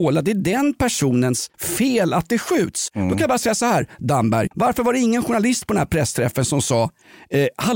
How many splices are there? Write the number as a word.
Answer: two